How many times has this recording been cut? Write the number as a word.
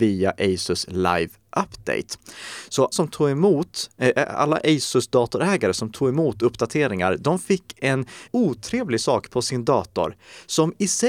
two